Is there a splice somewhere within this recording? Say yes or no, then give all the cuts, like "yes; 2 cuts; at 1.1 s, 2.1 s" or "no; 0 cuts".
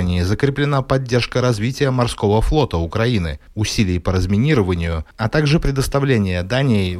no; 0 cuts